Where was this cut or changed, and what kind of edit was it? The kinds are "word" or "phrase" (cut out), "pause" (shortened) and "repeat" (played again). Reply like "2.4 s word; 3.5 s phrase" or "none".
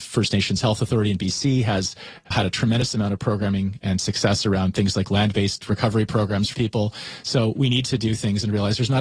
2.3 s word; 6.5 s word